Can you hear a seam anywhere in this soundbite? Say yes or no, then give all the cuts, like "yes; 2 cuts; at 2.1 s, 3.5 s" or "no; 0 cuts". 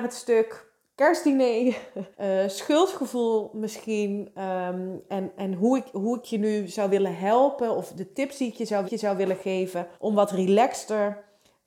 yes; 4 cuts; at 2.1 s, 5.1 s, 8.8 s, 9.9 s